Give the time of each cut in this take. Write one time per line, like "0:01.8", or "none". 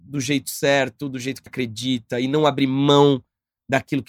0:01.5